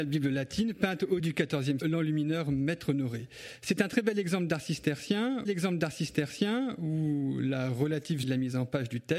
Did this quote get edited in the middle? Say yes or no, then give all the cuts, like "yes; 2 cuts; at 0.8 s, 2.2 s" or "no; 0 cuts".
yes; 4 cuts; at 1.2 s, 1.8 s, 5.5 s, 8.2 s